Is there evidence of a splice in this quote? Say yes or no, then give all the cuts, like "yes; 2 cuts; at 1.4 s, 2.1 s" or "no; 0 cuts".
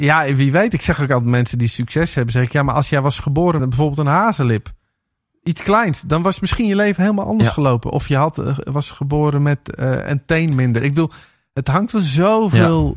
yes; 1 cut; at 3.6 s